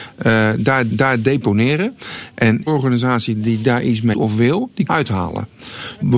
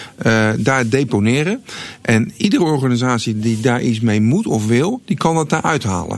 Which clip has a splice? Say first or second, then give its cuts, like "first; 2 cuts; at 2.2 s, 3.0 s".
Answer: first; 4 cuts; at 0.9 s, 2.7 s, 4.1 s, 4.9 s